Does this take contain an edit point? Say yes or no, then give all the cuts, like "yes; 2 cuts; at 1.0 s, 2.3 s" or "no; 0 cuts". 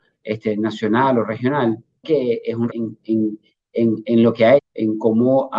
yes; 3 cuts; at 2.0 s, 2.7 s, 4.6 s